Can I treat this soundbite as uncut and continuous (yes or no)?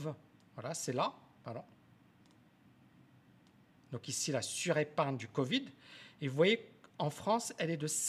yes